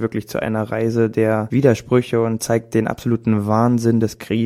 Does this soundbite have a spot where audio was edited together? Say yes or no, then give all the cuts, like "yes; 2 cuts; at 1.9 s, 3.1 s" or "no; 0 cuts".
no; 0 cuts